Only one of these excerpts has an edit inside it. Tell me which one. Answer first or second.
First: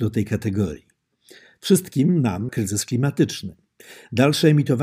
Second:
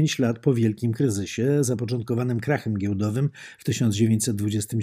first